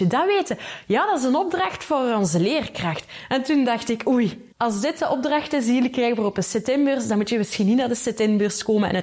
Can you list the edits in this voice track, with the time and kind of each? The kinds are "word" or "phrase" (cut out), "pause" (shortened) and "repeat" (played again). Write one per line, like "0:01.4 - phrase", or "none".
0:04.5 - pause